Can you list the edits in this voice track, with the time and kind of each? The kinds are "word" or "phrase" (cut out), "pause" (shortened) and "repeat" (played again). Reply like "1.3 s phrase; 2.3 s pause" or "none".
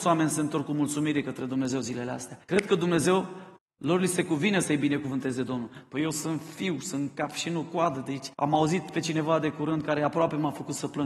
2.4 s pause; 3.6 s pause; 8.3 s pause